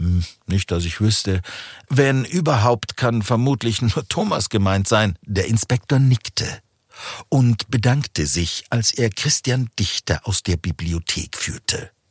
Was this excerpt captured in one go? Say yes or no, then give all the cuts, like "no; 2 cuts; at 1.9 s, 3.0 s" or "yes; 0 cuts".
no; 1 cut; at 5.2 s